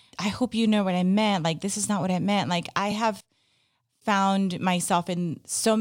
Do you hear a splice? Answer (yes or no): no